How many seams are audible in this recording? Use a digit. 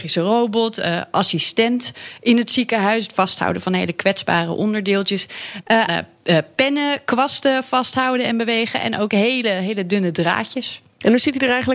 1